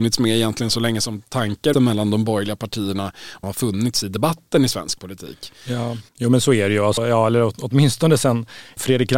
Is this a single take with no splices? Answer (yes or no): no